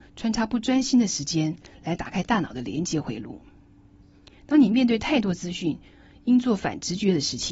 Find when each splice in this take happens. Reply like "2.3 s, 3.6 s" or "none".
none